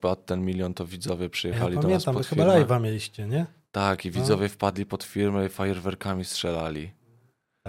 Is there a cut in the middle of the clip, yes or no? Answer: no